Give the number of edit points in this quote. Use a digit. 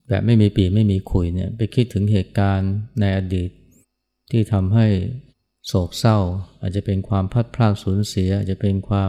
2